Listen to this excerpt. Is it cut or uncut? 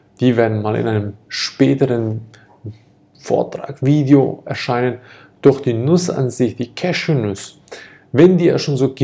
uncut